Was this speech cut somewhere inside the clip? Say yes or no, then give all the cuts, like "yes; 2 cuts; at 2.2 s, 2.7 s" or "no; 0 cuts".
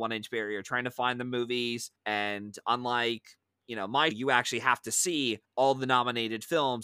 yes; 3 cuts; at 2.0 s, 4.1 s, 5.4 s